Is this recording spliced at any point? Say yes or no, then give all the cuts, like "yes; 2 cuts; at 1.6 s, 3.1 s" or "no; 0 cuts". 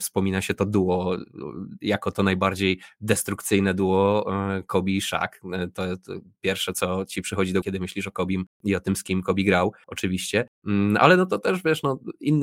yes; 1 cut; at 7.6 s